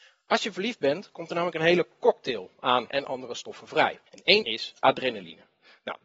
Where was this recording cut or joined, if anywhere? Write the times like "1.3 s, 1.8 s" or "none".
2.9 s, 4.1 s, 4.4 s